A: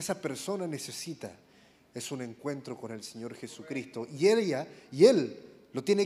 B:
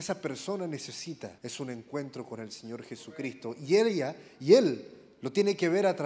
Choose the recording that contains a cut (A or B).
B